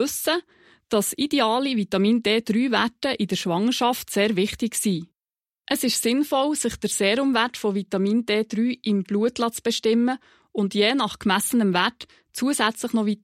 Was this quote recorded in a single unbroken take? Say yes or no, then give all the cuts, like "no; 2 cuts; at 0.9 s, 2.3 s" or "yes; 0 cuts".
yes; 0 cuts